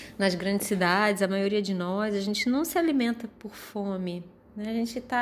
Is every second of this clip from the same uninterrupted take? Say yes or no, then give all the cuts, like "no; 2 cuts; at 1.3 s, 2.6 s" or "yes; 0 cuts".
yes; 0 cuts